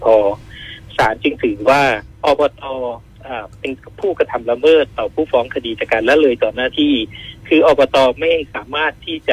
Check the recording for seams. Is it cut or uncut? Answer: cut